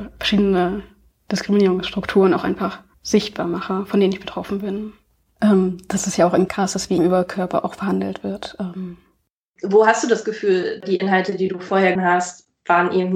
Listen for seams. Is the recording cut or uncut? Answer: cut